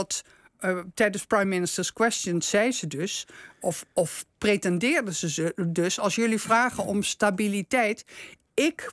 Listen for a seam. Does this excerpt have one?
no; 0 cuts

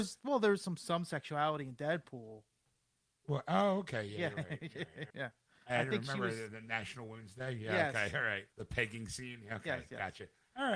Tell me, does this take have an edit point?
yes; 3 cuts; at 3.0 s, 5.1 s, 8.5 s

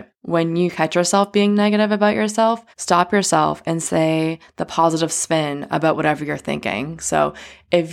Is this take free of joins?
no; 1 cut; at 2.7 s

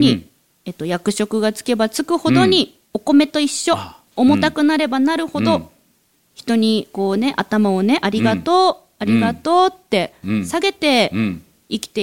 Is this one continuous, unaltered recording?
no; 1 cut; at 2.9 s

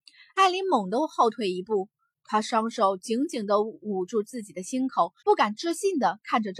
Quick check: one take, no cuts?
no; 1 cut; at 5.2 s

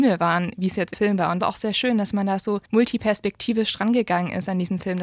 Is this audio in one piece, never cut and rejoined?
no; 3 cuts; at 0.9 s, 1.4 s, 2.7 s

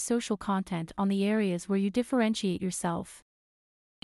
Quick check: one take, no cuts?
yes; 0 cuts

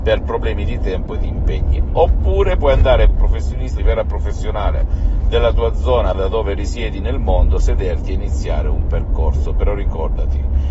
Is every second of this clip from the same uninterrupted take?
no; 3 cuts; at 3.1 s, 3.8 s, 6.1 s

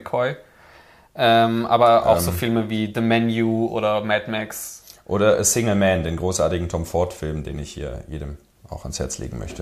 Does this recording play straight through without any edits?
yes; 0 cuts

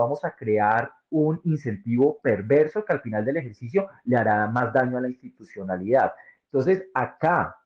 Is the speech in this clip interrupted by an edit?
no; 0 cuts

